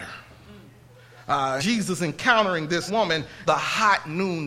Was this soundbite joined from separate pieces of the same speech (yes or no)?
yes